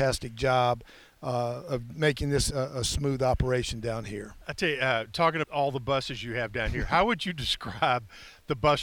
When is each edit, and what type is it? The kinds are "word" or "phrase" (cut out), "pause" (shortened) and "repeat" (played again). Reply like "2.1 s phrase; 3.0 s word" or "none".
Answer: 2.5 s word; 5.4 s word

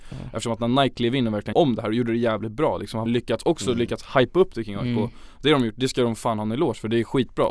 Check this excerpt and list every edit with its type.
1.5 s word; 3.1 s word

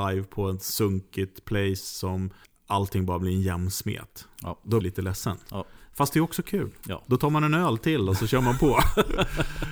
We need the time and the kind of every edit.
2.4 s pause; 4.8 s phrase

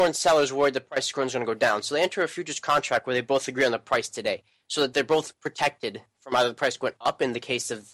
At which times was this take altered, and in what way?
none

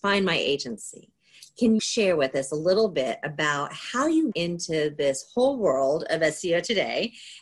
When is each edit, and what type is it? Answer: 1.8 s word; 4.3 s word

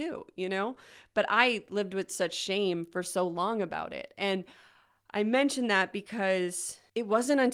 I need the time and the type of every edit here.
none

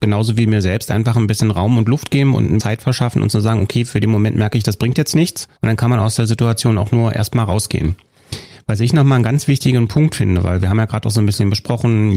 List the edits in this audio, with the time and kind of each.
2.6 s word; 5.6 s pause

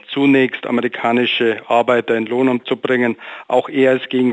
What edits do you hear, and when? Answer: 2.6 s word

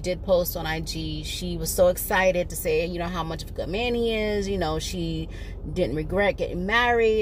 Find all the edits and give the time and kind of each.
none

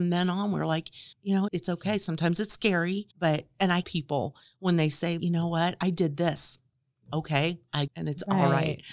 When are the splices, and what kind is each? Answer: 1.1 s pause; 1.5 s word; 3.1 s pause; 3.8 s phrase; 5.2 s word; 7.9 s phrase

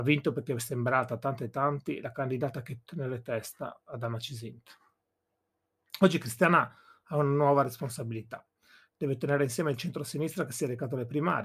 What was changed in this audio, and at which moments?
2.8 s word

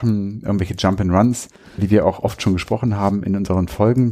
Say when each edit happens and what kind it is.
1.8 s word

